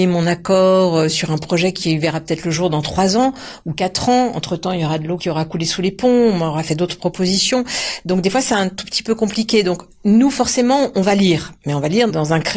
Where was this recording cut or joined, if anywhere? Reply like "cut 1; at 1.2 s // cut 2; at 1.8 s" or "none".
none